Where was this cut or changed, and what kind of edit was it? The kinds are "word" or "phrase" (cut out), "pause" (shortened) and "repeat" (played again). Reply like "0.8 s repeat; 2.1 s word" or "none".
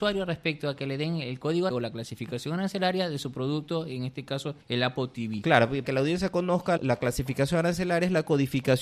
1.7 s word; 4.6 s pause; 5.8 s word; 6.8 s word